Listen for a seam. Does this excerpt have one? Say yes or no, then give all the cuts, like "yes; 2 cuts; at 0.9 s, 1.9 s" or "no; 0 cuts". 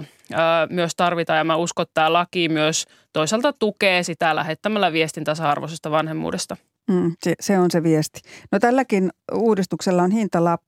no; 0 cuts